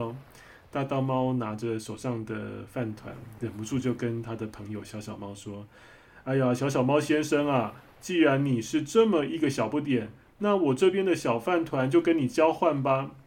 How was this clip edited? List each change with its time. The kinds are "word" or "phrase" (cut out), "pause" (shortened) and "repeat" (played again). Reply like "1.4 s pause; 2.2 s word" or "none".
none